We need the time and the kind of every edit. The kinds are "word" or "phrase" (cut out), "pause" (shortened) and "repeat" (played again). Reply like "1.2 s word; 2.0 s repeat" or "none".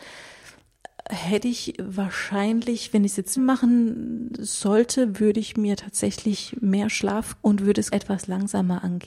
3.4 s word; 7.4 s word; 7.9 s word